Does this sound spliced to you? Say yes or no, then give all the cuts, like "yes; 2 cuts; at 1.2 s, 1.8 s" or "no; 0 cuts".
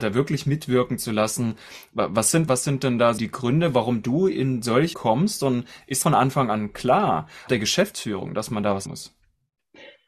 yes; 6 cuts; at 2.5 s, 3.2 s, 4.9 s, 6.0 s, 7.5 s, 8.9 s